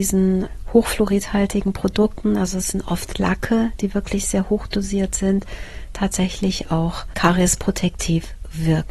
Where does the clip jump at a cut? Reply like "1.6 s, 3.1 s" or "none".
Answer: none